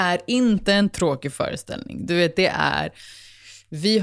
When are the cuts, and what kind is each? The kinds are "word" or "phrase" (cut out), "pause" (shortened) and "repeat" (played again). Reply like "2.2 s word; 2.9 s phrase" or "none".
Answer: none